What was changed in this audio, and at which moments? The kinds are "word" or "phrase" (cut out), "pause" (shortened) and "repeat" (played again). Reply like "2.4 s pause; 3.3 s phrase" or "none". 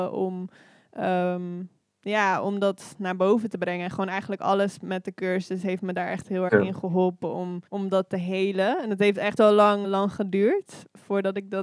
6.5 s word; 7.7 s pause; 9.4 s word; 9.8 s word